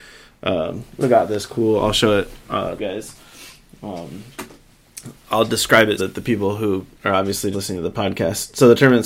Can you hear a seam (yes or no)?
yes